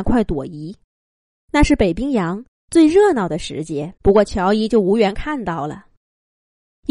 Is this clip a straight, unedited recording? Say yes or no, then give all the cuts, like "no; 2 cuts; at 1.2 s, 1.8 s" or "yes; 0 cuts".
no; 2 cuts; at 0.9 s, 4.0 s